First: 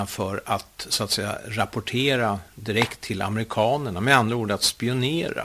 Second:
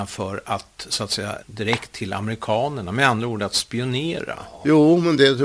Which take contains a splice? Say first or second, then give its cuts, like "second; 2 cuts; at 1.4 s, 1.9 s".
second; 1 cut; at 1.4 s